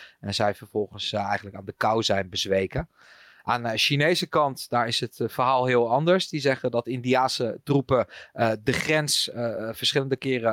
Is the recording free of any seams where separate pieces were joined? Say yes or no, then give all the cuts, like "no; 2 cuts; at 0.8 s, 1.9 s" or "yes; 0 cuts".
yes; 0 cuts